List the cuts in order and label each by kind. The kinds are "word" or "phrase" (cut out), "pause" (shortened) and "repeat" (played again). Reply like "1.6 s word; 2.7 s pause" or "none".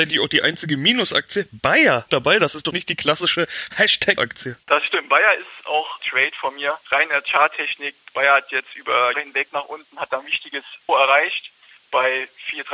2.1 s phrase; 2.7 s word; 4.2 s word; 4.6 s pause; 6.0 s phrase; 6.8 s pause; 9.1 s word; 9.5 s word; 10.9 s word